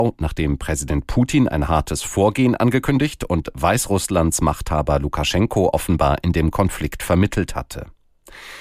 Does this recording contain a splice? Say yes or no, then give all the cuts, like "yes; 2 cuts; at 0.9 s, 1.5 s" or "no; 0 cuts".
no; 0 cuts